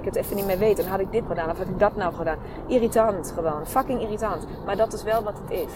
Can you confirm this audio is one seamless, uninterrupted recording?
no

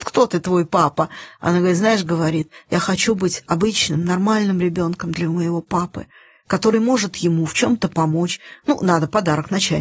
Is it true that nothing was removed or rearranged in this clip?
yes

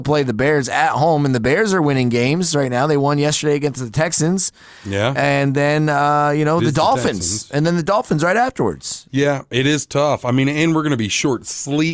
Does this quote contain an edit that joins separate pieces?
no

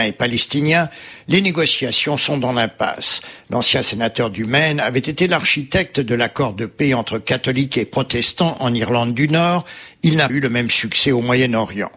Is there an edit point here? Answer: yes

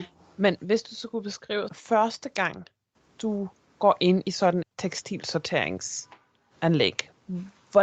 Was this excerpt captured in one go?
no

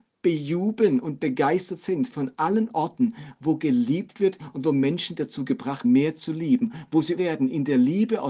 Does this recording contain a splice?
yes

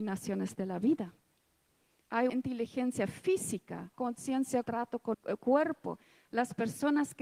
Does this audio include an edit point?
yes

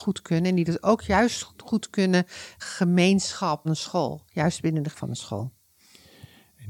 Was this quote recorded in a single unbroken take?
no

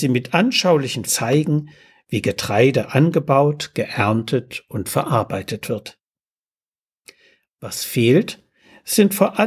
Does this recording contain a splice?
yes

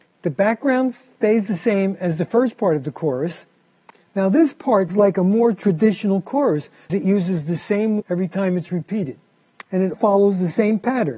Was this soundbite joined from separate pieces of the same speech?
yes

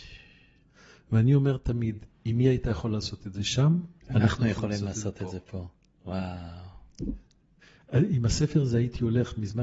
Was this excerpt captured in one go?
no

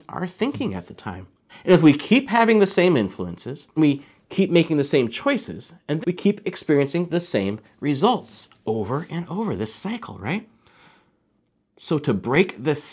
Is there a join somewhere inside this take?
yes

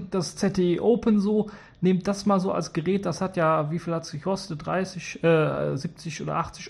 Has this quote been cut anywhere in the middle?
no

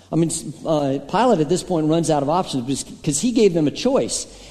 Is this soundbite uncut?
yes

